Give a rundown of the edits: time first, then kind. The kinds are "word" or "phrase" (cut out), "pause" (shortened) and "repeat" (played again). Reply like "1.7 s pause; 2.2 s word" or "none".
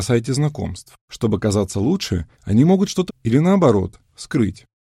1.0 s pause; 2.3 s pause; 3.1 s word